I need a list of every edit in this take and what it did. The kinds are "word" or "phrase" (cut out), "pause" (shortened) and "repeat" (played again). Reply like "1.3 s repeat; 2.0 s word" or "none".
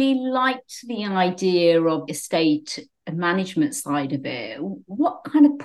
2.1 s word